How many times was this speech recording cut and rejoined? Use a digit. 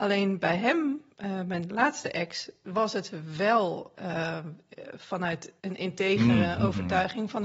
2